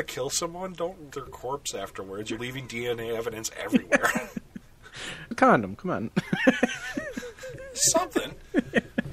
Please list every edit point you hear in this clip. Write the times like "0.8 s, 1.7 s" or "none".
1.1 s, 2.4 s, 5.3 s